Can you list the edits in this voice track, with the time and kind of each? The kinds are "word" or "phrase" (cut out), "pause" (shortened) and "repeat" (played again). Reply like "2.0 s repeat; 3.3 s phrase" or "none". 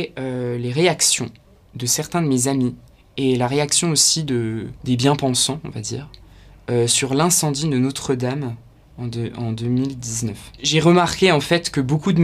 4.8 s pause